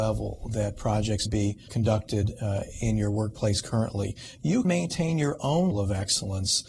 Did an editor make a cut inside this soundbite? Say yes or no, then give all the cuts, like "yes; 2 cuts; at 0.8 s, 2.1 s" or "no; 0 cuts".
yes; 4 cuts; at 1.2 s, 1.7 s, 4.6 s, 5.7 s